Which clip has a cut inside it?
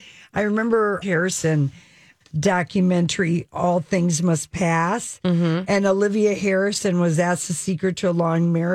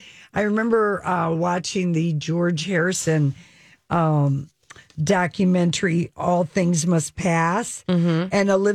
first; 2 cuts; at 1.0 s, 2.2 s

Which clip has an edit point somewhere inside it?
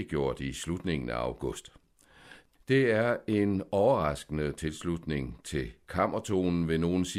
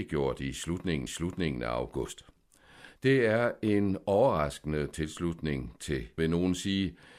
second; 3 cuts; at 1.1 s, 3.0 s, 6.2 s

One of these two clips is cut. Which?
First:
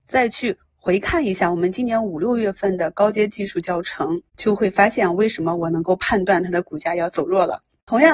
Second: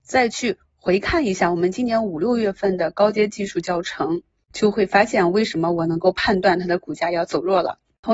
first; 1 cut; at 4.3 s

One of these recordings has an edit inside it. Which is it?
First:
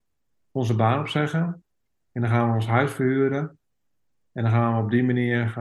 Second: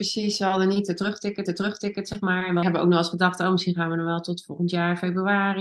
second; 2 cuts; at 1.5 s, 2.6 s

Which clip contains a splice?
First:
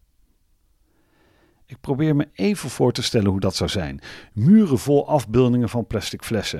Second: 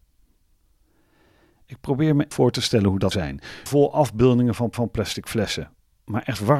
second; 4 cuts; at 2.3 s, 3.1 s, 3.7 s, 4.7 s

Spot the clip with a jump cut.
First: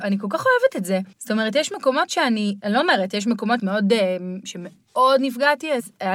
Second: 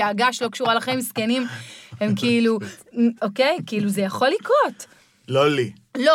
first; 2 cuts; at 1.1 s, 3.6 s

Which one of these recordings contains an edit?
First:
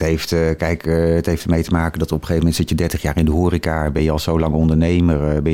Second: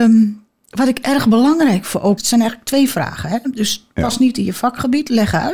second; 1 cut; at 2.2 s

